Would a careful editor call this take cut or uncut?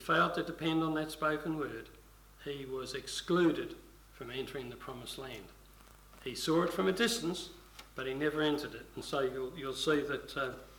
uncut